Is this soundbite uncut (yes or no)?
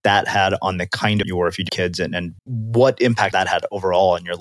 no